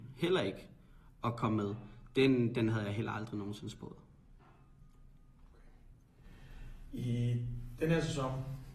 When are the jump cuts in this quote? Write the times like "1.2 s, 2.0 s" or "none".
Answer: none